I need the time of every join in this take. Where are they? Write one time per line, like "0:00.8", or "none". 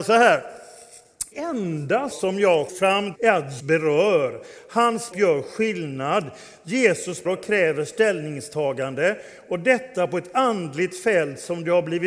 0:01.3
0:02.1
0:02.7
0:03.1
0:03.6
0:05.1
0:07.2